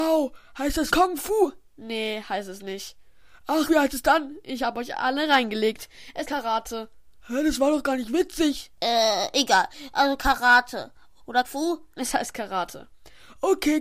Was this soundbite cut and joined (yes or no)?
yes